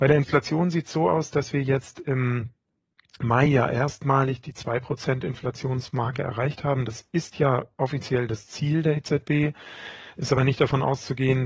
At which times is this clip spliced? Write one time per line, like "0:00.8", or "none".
none

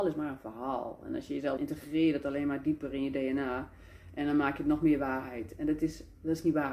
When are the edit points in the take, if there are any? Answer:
0:01.6

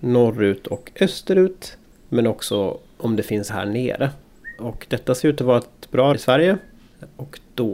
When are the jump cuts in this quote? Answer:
0:01.9
0:03.5
0:06.1

